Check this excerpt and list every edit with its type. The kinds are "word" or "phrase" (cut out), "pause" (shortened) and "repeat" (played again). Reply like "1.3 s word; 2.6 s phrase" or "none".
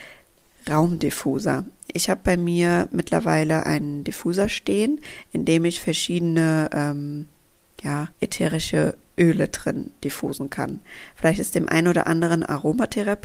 8.1 s pause